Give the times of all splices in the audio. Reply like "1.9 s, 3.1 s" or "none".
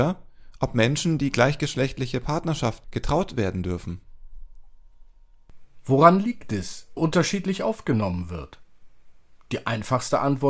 2.8 s, 7.0 s